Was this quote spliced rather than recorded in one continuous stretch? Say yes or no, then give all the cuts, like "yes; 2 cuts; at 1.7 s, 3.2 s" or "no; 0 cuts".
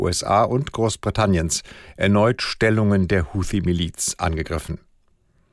no; 0 cuts